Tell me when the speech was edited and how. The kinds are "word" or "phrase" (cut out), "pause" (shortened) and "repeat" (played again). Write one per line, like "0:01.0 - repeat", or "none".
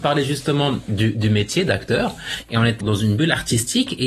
0:02.8 - word